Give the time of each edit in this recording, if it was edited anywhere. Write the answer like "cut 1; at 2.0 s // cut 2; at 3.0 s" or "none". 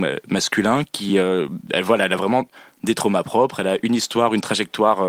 none